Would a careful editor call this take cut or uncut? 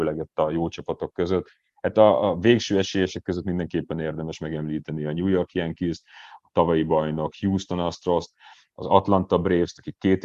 uncut